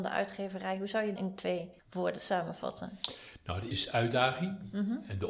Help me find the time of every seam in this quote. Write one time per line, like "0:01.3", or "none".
0:01.2
0:01.8
0:03.7